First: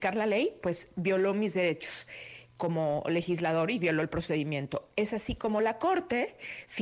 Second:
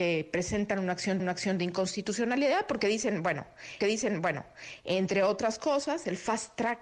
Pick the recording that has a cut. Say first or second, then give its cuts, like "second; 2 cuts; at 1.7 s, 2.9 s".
second; 2 cuts; at 1.2 s, 3.8 s